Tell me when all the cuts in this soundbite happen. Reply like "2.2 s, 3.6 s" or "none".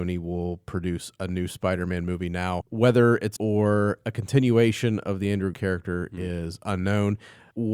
3.4 s, 5.5 s

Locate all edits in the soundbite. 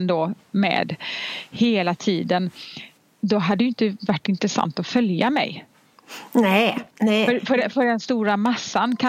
3.0 s, 6.9 s

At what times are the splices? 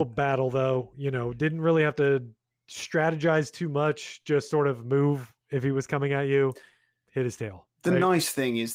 none

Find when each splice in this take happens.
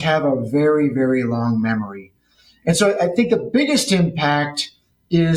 none

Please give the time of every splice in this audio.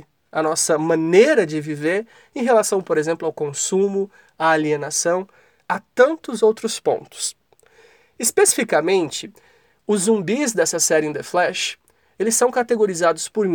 none

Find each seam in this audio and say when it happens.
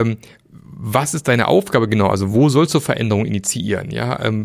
none

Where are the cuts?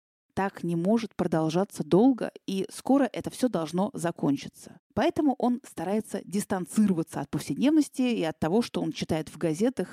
4.9 s

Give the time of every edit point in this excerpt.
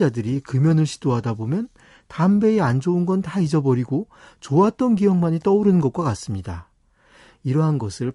none

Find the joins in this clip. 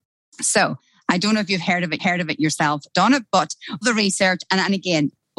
2.0 s, 3.8 s

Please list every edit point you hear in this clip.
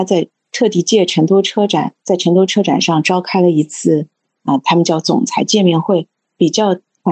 2.0 s

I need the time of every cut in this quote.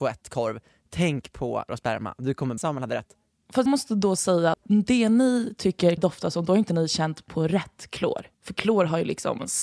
1.7 s, 2.6 s, 3.7 s, 4.5 s, 6.0 s, 8.3 s

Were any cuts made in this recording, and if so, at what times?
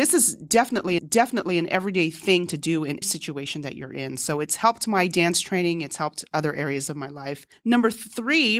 1.0 s, 3.0 s, 7.5 s

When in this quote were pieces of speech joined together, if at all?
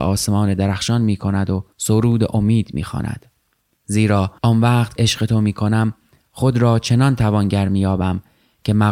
1.7 s, 4.4 s, 5.0 s

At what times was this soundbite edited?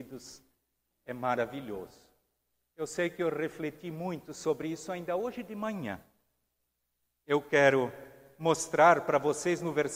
none

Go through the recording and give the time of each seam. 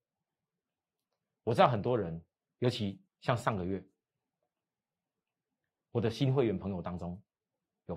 2.4 s, 3.1 s

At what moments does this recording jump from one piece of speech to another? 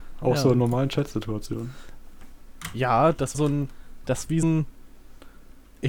3.3 s, 4.4 s

